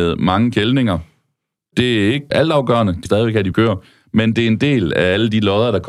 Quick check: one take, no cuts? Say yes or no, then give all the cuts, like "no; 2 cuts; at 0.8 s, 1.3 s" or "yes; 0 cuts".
no; 3 cuts; at 2.3 s, 3.1 s, 3.5 s